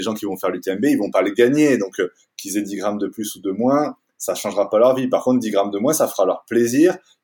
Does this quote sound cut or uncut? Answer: uncut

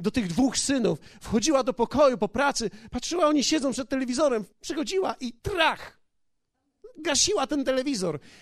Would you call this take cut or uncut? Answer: cut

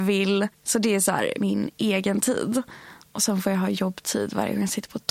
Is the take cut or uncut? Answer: uncut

